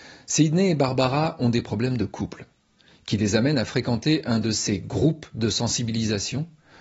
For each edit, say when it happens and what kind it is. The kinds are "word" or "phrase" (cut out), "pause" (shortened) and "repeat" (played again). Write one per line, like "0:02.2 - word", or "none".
none